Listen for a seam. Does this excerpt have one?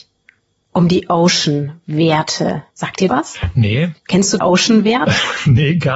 yes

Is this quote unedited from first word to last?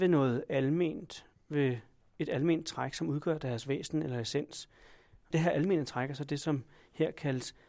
yes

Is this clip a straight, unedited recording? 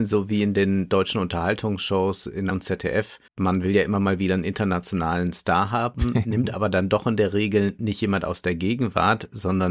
no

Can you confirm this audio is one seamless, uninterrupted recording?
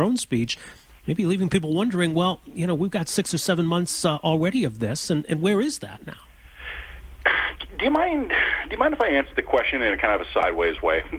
yes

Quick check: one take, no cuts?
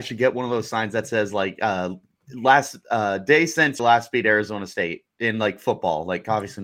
no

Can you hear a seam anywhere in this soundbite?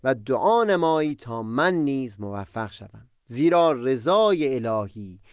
yes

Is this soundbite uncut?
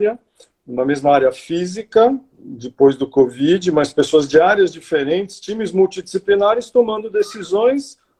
yes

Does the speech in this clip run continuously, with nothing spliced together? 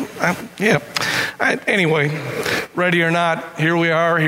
yes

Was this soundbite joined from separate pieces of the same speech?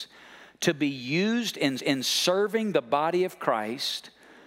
yes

